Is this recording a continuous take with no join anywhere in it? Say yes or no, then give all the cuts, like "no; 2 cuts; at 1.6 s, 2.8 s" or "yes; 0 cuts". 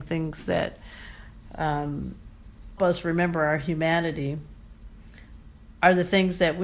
no; 1 cut; at 2.8 s